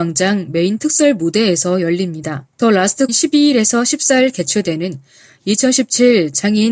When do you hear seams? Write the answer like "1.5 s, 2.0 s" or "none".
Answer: 2.5 s, 3.1 s